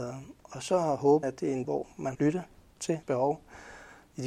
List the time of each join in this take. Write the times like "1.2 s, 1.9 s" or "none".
1.2 s, 1.6 s, 2.1 s, 3.0 s